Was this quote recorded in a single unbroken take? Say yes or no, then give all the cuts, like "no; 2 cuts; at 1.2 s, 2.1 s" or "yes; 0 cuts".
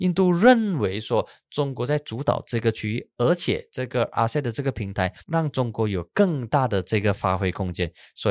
no; 1 cut; at 5.2 s